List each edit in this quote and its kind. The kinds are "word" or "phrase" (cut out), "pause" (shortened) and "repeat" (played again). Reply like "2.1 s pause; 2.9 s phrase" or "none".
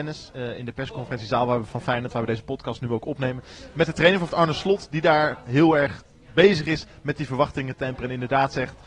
4.3 s word